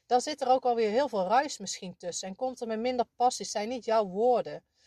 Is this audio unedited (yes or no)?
yes